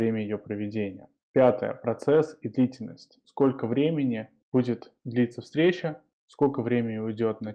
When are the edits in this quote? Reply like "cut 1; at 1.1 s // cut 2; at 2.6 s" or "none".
none